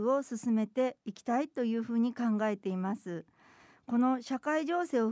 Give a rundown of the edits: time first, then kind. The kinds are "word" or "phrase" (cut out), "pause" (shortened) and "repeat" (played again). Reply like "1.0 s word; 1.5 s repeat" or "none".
none